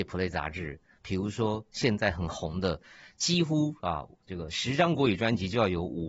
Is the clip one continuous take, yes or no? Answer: yes